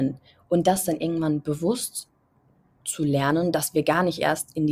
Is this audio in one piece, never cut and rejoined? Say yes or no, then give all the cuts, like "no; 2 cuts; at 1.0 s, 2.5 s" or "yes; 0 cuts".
yes; 0 cuts